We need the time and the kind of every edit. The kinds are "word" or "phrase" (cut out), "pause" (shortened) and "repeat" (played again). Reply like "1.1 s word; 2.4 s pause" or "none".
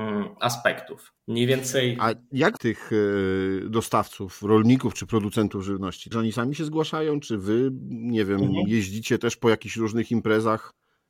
1.2 s pause; 2.6 s word; 6.1 s phrase

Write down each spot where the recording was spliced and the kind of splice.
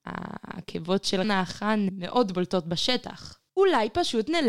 1.2 s word; 1.9 s word; 3.5 s pause

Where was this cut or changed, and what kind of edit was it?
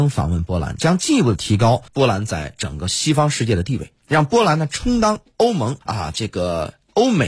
1.9 s pause; 5.8 s pause

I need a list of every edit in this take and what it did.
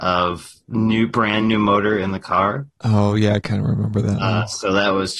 none

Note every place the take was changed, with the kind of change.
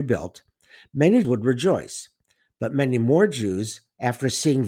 1.2 s word

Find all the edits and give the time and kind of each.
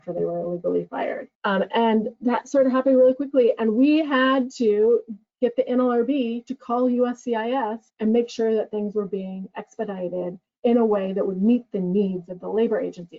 1.3 s pause; 7.9 s pause

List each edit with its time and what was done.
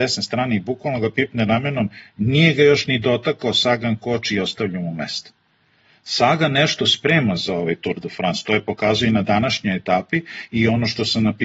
none

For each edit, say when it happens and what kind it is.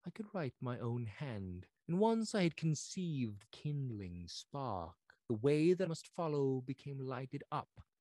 3.5 s word; 5.9 s word

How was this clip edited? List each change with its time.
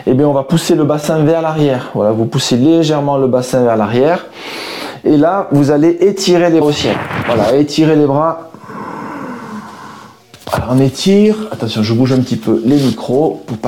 6.6 s word

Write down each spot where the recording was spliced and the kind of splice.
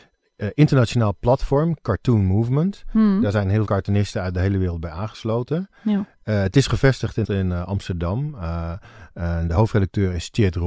3.6 s word; 7.2 s word

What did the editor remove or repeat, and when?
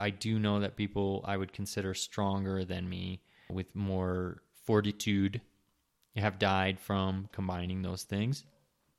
3.5 s word

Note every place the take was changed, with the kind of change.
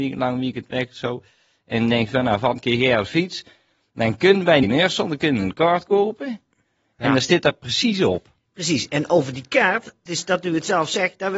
4.6 s phrase; 10.1 s word

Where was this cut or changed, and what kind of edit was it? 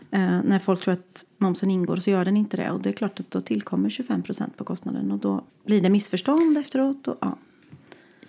5.5 s pause

